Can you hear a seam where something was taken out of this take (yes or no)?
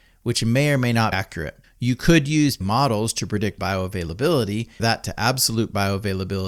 yes